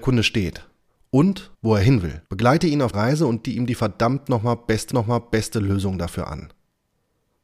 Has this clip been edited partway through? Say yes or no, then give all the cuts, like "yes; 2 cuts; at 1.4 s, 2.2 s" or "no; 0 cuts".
yes; 5 cuts; at 1.5 s, 2.2 s, 2.9 s, 3.4 s, 4.9 s